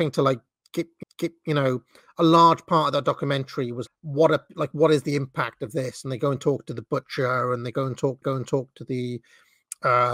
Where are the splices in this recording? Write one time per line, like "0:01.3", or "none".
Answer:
0:01.0
0:03.9
0:08.2